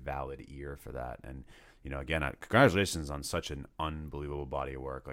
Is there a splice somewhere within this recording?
no; 0 cuts

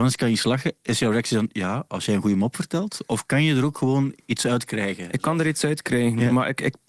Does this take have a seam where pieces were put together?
yes; 1 cut; at 4.2 s

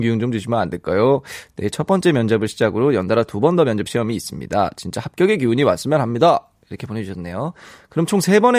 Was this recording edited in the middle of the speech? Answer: no; 0 cuts

